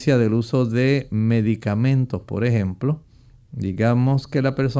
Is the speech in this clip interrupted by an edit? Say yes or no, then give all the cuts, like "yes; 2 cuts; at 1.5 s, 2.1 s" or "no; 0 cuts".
no; 0 cuts